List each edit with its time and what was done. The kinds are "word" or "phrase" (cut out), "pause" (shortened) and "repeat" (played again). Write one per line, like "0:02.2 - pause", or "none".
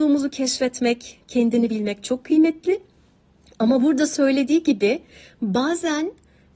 none

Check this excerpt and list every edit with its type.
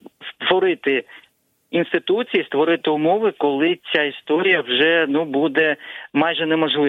none

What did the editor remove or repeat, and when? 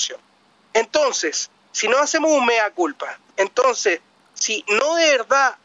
none

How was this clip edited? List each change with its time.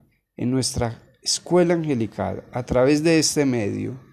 none

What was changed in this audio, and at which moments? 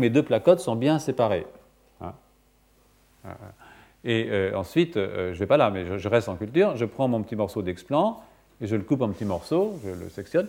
none

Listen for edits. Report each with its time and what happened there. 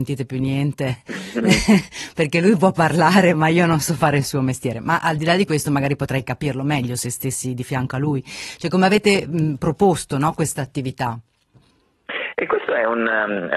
none

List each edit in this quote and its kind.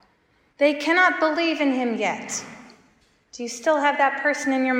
0:03.0 - pause

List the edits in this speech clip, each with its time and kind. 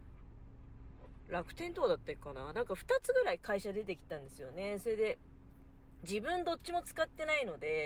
0:06.0 - phrase

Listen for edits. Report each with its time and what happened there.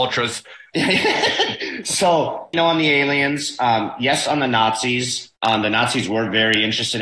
0:02.5 - word
0:05.4 - pause

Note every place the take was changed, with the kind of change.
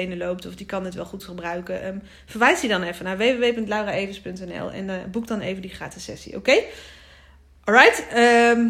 none

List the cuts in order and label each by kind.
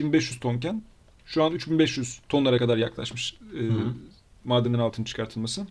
0:01.1 - pause
0:02.2 - pause

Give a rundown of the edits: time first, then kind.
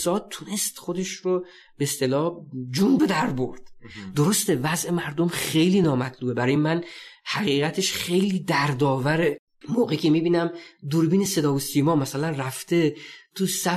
none

